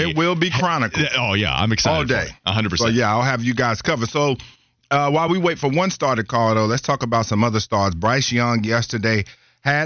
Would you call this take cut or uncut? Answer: uncut